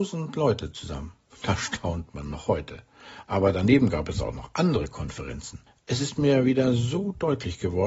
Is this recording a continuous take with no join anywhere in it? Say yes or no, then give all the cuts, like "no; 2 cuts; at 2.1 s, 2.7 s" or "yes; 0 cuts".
no; 1 cut; at 5.7 s